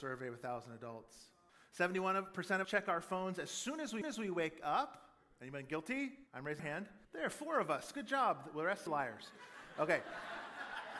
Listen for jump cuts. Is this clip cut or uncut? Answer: cut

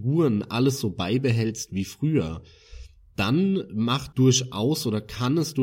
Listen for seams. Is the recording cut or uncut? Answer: cut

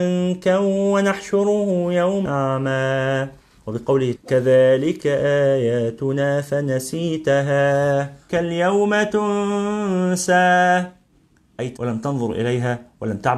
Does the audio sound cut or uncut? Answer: cut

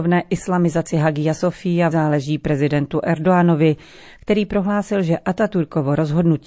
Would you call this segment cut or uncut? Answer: cut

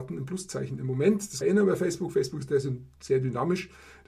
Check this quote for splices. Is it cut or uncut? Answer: cut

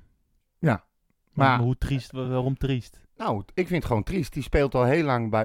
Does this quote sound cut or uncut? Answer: uncut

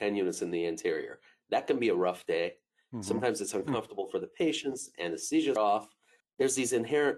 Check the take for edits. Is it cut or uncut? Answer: cut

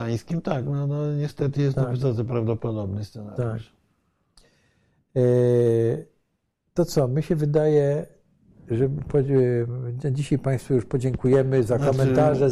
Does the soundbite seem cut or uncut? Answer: uncut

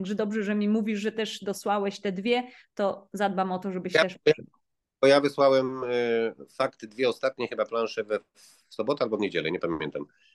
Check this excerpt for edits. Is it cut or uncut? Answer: uncut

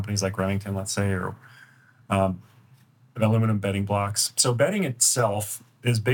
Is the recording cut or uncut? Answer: uncut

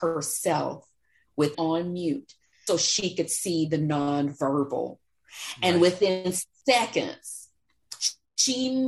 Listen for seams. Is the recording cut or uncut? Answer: cut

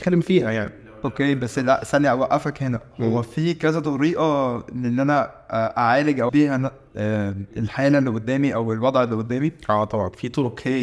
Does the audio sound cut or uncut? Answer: cut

